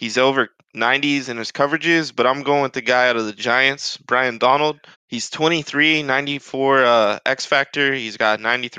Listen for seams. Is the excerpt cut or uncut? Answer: cut